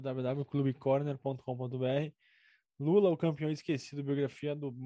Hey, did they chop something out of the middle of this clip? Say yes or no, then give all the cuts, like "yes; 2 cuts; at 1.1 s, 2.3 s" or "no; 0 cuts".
no; 0 cuts